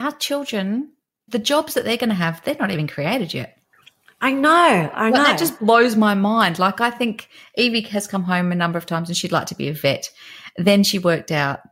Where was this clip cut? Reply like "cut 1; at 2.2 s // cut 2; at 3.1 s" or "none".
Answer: none